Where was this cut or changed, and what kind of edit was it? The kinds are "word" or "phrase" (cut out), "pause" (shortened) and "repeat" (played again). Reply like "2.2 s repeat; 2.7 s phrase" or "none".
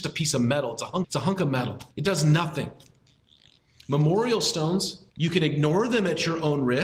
1.0 s word; 1.9 s pause; 5.1 s pause